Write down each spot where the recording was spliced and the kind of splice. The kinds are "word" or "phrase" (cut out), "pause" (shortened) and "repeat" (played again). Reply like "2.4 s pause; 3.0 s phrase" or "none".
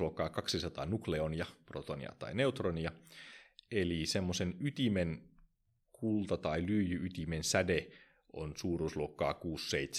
none